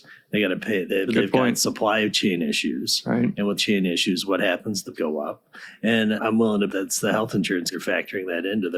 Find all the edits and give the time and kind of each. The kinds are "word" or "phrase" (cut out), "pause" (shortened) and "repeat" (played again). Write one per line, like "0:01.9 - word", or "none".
0:01.1 - word
0:03.6 - word
0:04.9 - word
0:06.2 - word
0:06.7 - word
0:07.7 - word